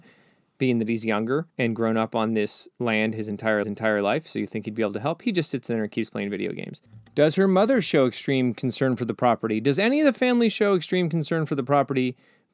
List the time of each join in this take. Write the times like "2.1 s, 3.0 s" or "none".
1.5 s, 3.6 s